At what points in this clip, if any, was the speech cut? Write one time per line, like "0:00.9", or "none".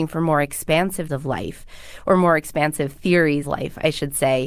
0:01.1
0:03.4